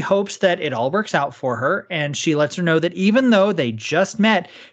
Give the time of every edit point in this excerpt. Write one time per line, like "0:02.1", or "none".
none